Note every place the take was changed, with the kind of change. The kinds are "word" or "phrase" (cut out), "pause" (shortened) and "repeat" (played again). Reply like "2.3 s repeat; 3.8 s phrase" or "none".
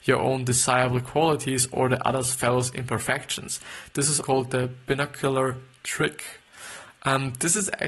4.2 s word